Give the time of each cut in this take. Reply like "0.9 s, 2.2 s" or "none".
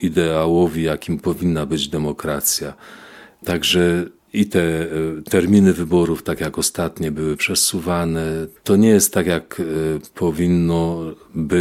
8.6 s